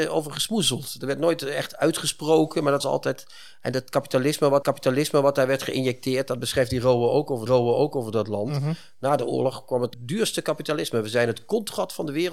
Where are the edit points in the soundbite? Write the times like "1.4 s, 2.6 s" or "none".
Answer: 2.8 s, 4.6 s, 7.5 s, 9.9 s